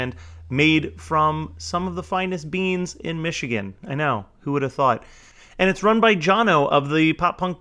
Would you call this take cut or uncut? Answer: cut